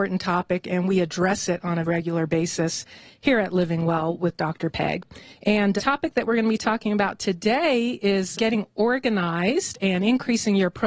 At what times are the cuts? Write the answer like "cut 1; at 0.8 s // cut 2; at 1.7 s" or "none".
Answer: cut 1; at 1.9 s // cut 2; at 5.8 s // cut 3; at 8.3 s